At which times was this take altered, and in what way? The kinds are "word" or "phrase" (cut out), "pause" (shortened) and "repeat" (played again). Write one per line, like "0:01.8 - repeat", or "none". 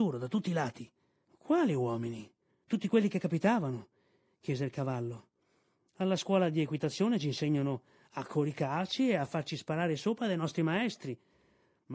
none